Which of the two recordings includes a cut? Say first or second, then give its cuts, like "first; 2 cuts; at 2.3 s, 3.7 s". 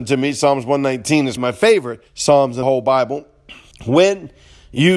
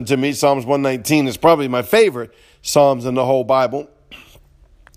first; 4 cuts; at 1.4 s, 2.1 s, 2.6 s, 3.7 s